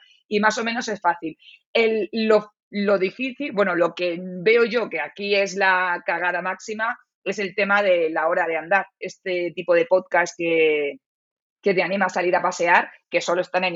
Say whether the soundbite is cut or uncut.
uncut